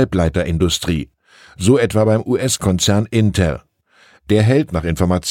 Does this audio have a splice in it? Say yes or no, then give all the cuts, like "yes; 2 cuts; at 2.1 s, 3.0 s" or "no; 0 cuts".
no; 0 cuts